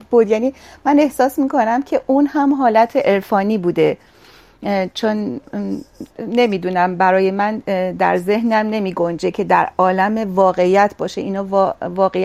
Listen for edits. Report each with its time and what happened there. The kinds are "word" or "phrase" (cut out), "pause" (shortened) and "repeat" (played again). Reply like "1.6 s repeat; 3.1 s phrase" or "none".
6.1 s pause